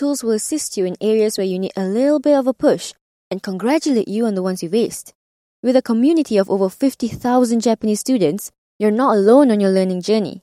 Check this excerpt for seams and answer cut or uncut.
uncut